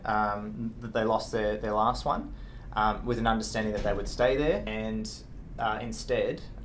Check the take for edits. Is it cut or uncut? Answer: uncut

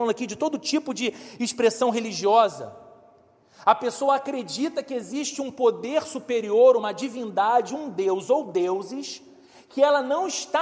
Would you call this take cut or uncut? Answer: uncut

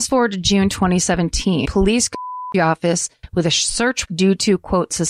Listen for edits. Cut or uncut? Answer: cut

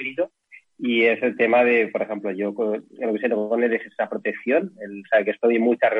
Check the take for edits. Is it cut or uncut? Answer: uncut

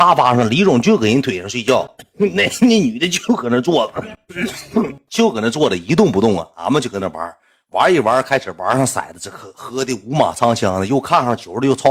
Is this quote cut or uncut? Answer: uncut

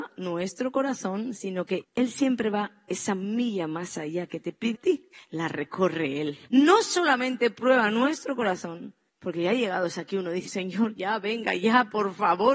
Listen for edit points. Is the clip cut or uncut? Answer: cut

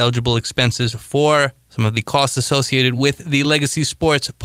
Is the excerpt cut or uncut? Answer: uncut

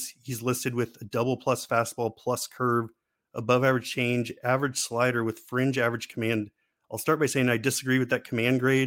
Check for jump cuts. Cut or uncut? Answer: uncut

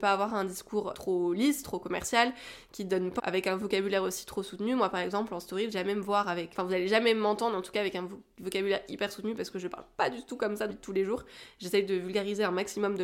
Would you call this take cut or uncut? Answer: cut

